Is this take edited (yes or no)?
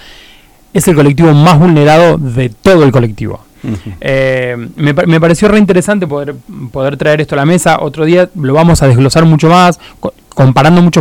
no